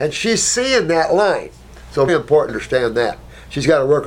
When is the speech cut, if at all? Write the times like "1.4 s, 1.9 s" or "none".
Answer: 2.1 s, 2.5 s